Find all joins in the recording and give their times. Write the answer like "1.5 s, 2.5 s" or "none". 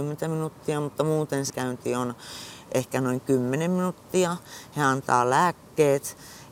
1.5 s